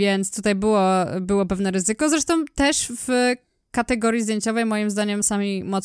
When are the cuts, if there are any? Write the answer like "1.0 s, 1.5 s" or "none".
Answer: none